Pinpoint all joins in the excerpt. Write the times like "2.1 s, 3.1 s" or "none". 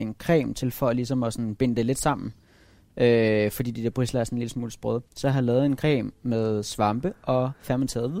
5.1 s